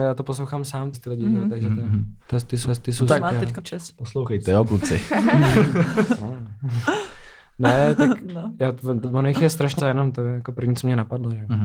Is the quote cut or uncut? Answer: cut